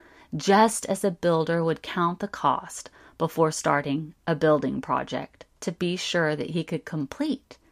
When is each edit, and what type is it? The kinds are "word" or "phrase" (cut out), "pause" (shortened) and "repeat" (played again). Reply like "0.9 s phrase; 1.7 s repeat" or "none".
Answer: none